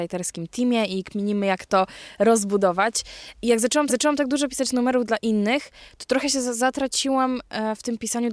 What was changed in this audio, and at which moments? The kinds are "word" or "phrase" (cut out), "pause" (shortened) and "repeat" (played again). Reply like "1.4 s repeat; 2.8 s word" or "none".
3.9 s repeat